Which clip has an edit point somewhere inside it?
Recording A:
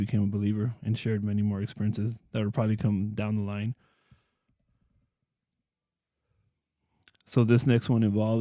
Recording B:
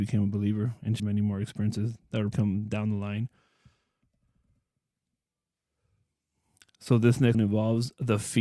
B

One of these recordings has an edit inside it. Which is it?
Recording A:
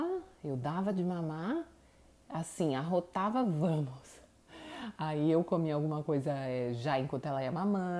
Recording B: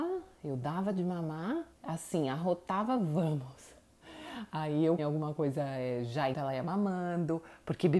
B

